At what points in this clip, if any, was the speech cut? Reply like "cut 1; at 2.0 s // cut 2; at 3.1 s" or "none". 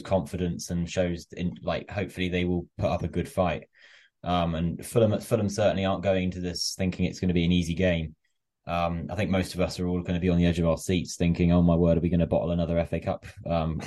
none